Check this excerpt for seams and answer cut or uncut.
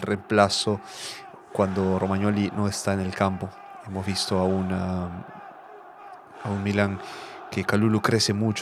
cut